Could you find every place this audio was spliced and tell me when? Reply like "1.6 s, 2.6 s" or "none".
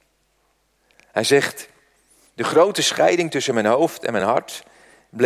none